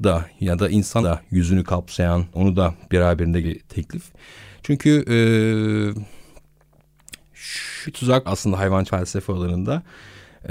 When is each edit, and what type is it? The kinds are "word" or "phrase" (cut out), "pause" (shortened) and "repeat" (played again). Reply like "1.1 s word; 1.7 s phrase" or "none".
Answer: 1.0 s word; 2.3 s word; 3.4 s word; 7.9 s word; 8.3 s word; 8.9 s word